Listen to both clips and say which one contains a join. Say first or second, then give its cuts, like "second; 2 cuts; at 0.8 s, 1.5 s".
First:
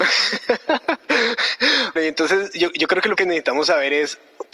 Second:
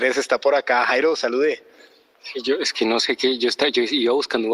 first; 2 cuts; at 2.0 s, 3.2 s